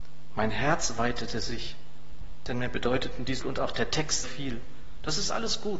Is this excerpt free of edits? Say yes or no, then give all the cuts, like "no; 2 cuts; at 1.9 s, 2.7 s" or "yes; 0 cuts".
no; 2 cuts; at 3.4 s, 4.2 s